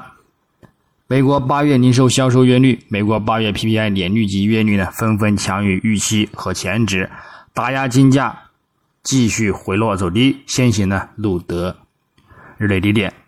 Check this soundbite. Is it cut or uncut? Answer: uncut